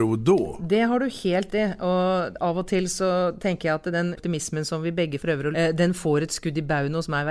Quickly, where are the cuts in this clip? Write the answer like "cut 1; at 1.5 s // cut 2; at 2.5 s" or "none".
cut 1; at 1.5 s // cut 2; at 4.1 s // cut 3; at 5.2 s // cut 4; at 5.5 s